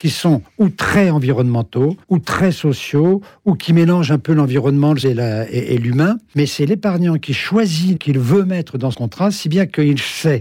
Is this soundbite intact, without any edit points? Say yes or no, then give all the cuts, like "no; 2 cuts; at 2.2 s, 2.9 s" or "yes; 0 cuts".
no; 5 cuts; at 2.0 s, 5.0 s, 6.3 s, 8.0 s, 8.9 s